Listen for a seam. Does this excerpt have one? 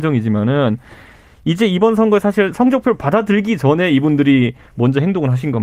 no; 0 cuts

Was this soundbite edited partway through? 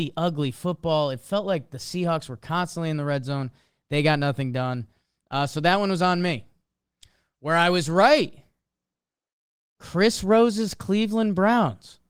no; 0 cuts

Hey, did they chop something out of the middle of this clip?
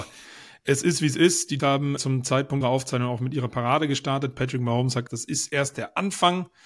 yes; 4 cuts; at 1.6 s, 2.0 s, 2.6 s, 5.1 s

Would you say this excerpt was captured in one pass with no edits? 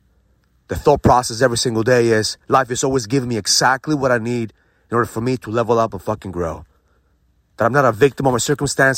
yes; 0 cuts

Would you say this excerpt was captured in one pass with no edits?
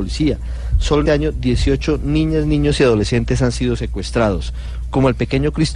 no; 1 cut; at 1.1 s

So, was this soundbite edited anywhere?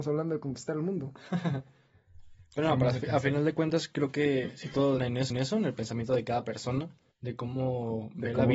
yes; 3 cuts; at 5.0 s, 5.3 s, 7.1 s

